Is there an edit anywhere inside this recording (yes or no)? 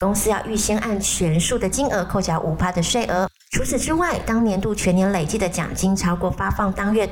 yes